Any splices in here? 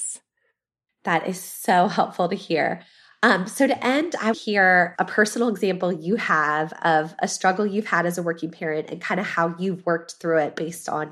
yes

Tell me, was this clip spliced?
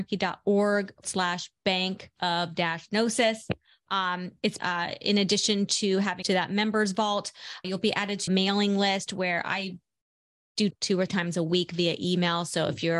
yes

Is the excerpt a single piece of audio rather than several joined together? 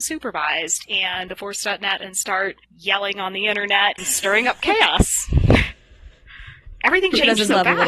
no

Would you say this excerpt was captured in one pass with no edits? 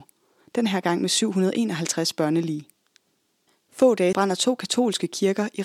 no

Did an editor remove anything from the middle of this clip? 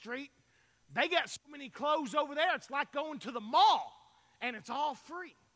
no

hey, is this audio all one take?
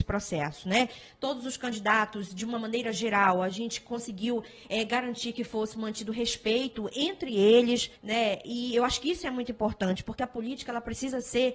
no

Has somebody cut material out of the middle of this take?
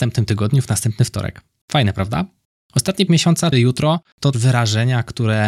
yes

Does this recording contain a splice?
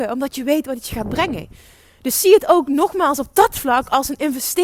no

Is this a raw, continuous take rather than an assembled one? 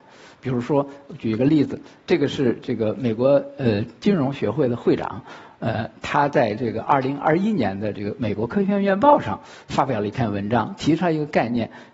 yes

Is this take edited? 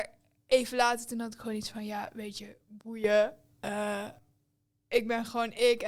no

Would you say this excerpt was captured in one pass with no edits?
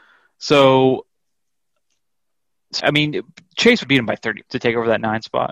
no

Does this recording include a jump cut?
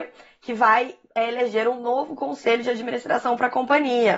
no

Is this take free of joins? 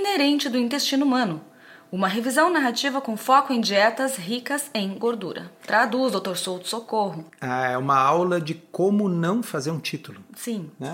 yes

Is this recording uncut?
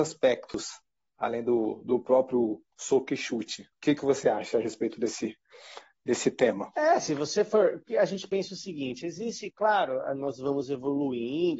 no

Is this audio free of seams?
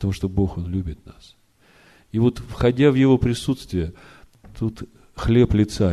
yes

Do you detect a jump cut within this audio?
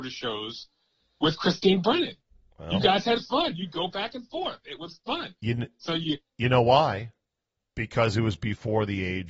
no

